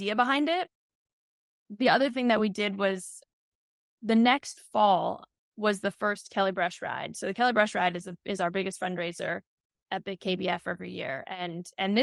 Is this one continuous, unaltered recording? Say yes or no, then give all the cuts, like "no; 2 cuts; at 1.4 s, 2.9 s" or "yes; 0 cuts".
yes; 0 cuts